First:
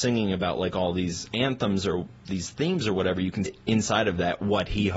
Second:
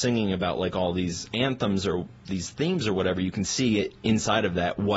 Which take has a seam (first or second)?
first